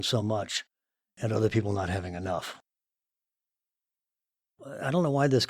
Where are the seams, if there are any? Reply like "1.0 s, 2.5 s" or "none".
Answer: none